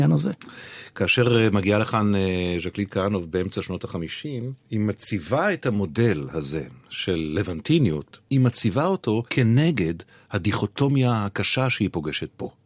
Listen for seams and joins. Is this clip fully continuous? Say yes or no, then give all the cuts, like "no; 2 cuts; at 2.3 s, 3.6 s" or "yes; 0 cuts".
no; 3 cuts; at 4.6 s, 8.2 s, 9.3 s